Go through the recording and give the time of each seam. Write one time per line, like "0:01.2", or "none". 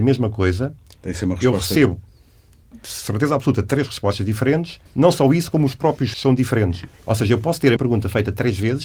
0:04.9
0:06.1
0:06.9
0:07.8